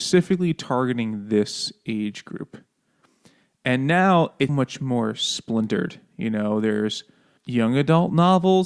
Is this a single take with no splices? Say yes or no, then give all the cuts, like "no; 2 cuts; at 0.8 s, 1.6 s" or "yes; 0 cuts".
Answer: no; 1 cut; at 4.5 s